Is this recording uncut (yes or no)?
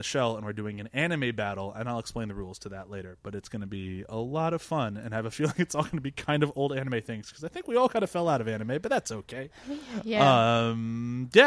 yes